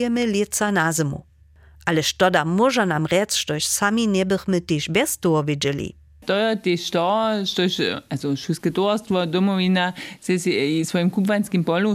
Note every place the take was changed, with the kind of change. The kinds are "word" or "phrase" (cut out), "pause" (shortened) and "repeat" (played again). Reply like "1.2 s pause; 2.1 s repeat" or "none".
none